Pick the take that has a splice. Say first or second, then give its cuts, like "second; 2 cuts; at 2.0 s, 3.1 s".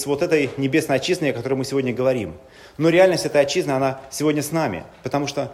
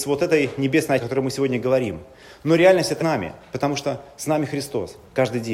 second; 2 cuts; at 1.0 s, 3.0 s